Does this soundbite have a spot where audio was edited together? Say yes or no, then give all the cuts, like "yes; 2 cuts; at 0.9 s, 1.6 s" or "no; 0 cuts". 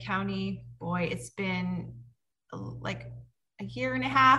no; 0 cuts